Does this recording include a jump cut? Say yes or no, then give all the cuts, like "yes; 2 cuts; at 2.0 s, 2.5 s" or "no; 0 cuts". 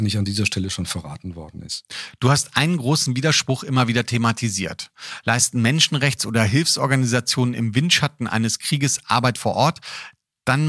no; 0 cuts